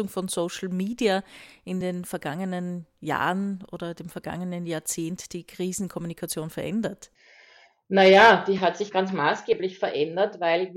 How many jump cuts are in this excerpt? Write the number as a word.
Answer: zero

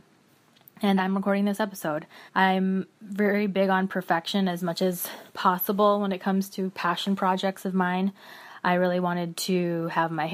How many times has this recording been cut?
two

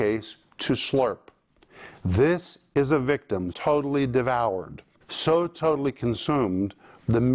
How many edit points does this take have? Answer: two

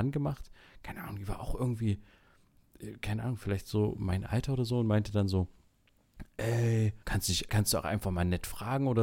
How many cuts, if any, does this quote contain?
two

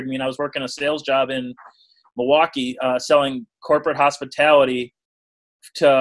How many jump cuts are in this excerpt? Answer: zero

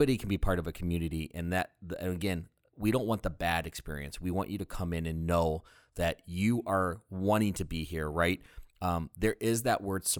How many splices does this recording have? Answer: zero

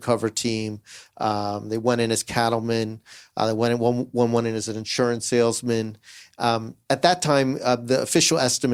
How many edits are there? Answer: zero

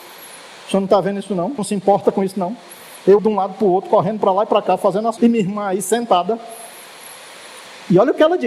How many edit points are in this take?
three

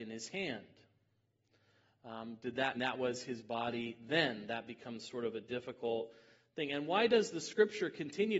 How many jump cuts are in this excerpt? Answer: one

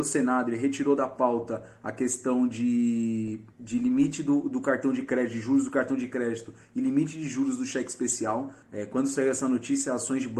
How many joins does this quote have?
two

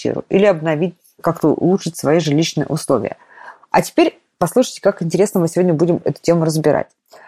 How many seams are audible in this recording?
zero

